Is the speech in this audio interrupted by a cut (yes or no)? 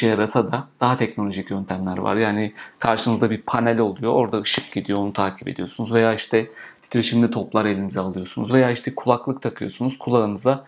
no